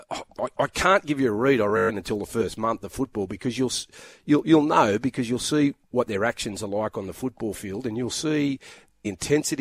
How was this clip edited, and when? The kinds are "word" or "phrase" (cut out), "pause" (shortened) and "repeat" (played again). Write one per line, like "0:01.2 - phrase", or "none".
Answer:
none